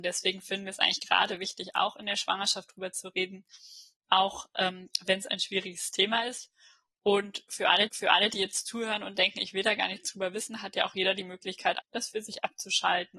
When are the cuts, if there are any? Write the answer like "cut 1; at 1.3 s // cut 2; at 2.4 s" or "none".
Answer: cut 1; at 7.9 s // cut 2; at 11.8 s